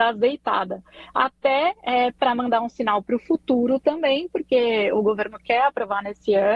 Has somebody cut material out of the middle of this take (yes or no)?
no